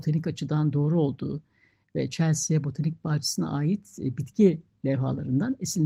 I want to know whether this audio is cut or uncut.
uncut